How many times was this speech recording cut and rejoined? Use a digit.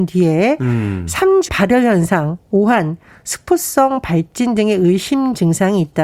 1